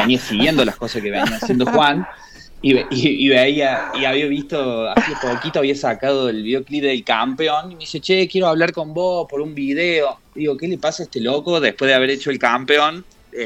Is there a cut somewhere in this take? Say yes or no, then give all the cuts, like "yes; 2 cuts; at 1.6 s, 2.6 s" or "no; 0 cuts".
no; 0 cuts